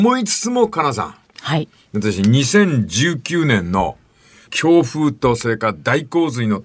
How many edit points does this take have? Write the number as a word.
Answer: zero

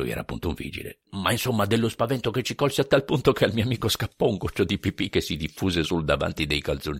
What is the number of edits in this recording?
one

